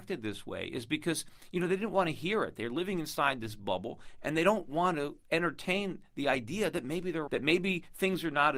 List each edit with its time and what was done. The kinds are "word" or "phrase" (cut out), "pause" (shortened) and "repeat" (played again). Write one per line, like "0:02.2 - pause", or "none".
0:07.3 - word